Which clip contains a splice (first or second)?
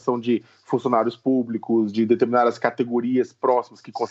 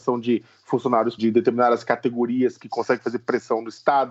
second